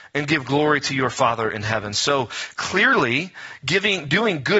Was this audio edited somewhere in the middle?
no; 0 cuts

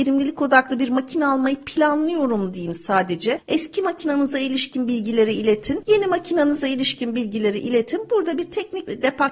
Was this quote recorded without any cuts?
yes; 0 cuts

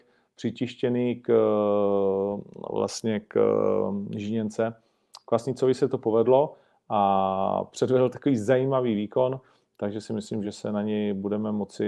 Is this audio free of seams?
yes; 0 cuts

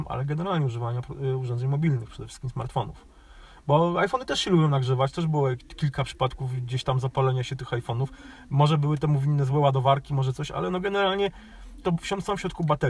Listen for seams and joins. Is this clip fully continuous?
no; 1 cut; at 11.8 s

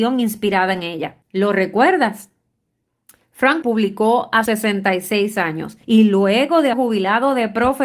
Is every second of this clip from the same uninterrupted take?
no; 5 cuts; at 1.2 s, 3.6 s, 4.4 s, 5.8 s, 6.7 s

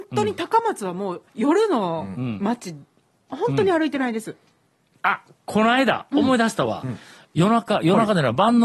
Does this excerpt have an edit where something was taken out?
yes; 1 cut; at 1.3 s

